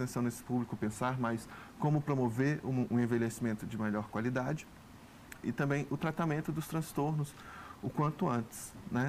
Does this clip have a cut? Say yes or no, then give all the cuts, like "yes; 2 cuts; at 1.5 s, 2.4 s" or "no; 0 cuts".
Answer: yes; 1 cut; at 5.4 s